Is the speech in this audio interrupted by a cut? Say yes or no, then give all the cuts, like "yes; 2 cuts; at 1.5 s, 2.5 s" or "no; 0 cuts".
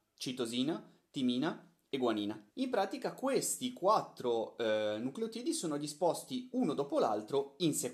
yes; 1 cut; at 2.5 s